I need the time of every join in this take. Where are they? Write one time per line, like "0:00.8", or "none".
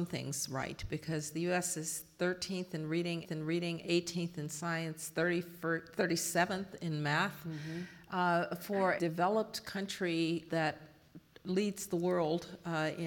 0:03.2
0:09.0
0:10.5